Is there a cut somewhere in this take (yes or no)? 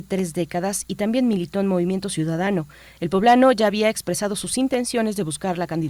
no